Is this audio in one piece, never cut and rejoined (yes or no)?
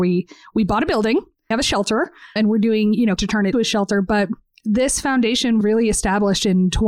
no